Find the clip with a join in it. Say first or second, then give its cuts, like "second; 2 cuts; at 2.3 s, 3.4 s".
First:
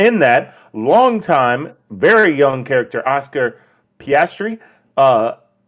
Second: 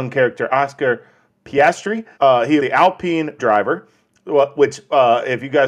second; 3 cuts; at 2.1 s, 2.6 s, 3.4 s